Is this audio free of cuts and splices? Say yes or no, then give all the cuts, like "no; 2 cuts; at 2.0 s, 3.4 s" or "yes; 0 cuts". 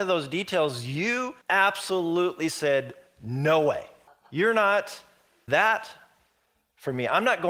no; 3 cuts; at 1.4 s, 4.1 s, 5.5 s